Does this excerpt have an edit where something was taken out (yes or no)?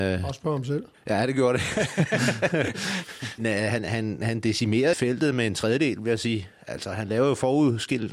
yes